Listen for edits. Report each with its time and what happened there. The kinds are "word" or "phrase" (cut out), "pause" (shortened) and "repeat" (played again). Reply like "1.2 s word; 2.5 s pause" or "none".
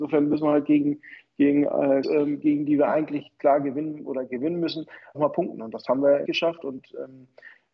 2.0 s word; 5.1 s phrase; 6.2 s phrase